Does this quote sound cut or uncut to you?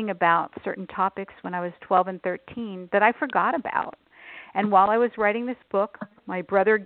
uncut